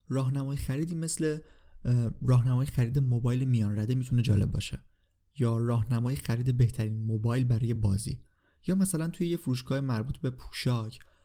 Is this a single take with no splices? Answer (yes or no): yes